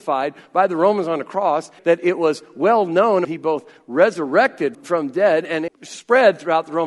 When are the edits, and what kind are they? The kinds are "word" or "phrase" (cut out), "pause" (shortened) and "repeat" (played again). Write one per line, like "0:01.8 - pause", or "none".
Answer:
0:01.8 - word
0:03.2 - phrase
0:04.7 - word
0:05.7 - phrase